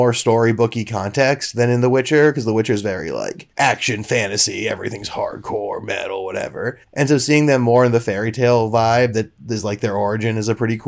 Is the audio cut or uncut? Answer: cut